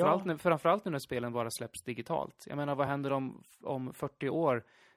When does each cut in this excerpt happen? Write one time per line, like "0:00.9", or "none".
none